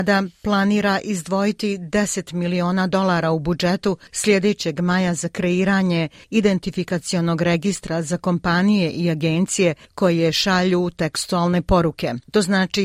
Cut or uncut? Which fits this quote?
uncut